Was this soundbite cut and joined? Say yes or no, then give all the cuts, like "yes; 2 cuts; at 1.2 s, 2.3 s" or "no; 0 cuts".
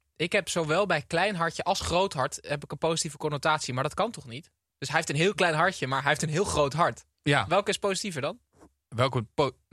no; 0 cuts